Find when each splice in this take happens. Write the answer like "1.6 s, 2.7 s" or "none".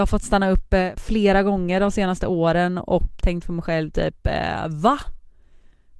3.2 s